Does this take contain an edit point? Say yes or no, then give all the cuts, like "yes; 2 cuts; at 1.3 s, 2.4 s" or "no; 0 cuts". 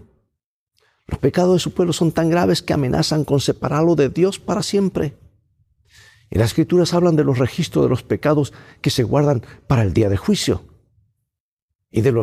no; 0 cuts